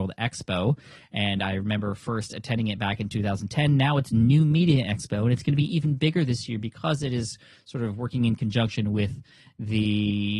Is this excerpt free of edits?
yes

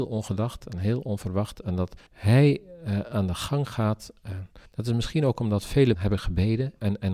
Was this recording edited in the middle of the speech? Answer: yes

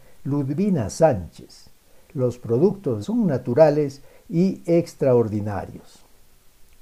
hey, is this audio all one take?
no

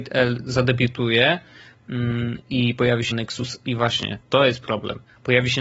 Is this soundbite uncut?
no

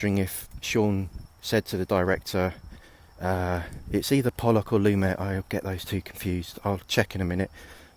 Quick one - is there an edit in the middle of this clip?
no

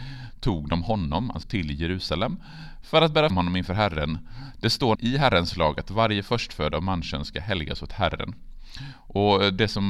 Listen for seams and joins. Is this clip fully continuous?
no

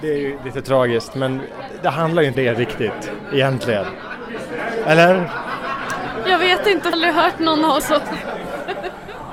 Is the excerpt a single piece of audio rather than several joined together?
no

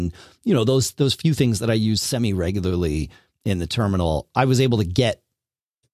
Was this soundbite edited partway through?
no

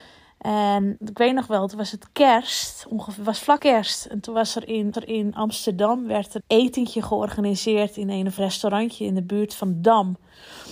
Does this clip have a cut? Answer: yes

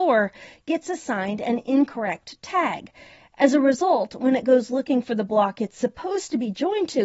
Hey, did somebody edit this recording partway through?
no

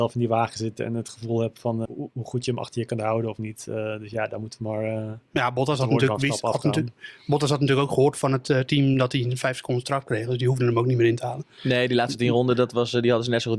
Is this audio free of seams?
no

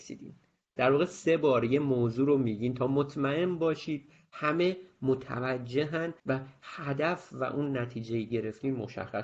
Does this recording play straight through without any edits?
no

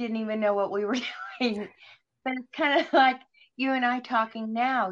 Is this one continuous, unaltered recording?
yes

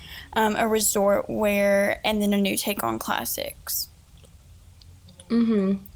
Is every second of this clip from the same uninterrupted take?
yes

